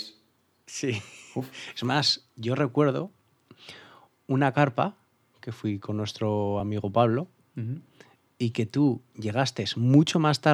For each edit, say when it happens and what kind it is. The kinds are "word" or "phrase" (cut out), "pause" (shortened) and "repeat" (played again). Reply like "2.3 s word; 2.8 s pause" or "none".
none